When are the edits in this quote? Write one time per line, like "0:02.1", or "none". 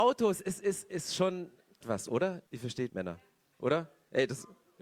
0:01.8
0:02.5
0:02.9

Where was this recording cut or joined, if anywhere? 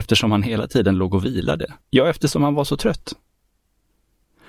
0:01.8

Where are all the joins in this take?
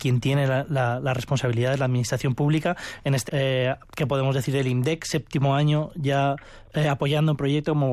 0:03.3
0:03.8

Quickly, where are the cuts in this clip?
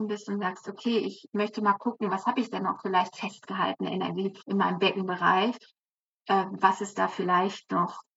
0:04.4

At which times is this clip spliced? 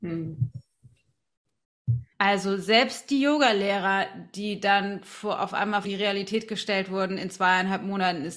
0:02.1
0:05.8

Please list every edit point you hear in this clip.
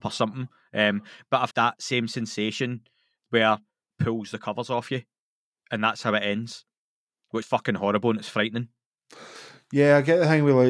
0:01.5
0:03.9
0:07.4

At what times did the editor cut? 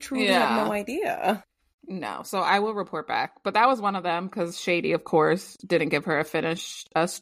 none

